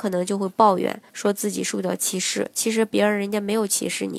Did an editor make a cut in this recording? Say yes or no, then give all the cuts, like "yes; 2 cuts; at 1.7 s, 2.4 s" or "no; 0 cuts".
yes; 1 cut; at 1.1 s